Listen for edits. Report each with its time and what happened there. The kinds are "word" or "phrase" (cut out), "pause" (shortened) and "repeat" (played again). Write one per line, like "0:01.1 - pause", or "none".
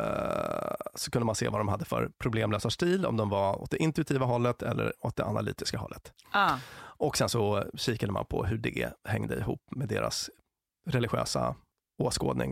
none